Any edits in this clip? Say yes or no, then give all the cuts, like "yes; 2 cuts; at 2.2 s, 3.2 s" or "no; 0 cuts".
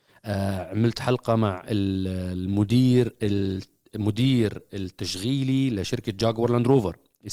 no; 0 cuts